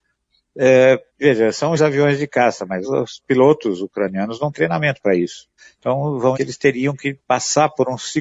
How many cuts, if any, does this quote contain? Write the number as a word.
six